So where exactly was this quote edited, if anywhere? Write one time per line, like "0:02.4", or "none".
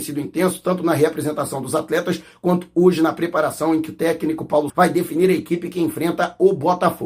0:04.7